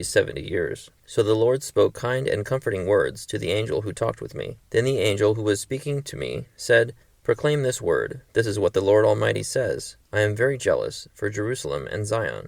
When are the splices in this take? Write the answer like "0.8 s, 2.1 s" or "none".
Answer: 1.0 s, 4.7 s, 7.0 s, 8.3 s, 10.0 s